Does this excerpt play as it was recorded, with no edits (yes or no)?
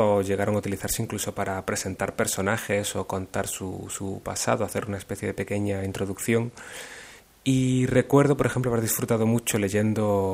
no